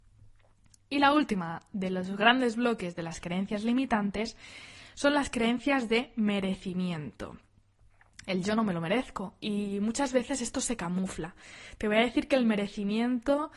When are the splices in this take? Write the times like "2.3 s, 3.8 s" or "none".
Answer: none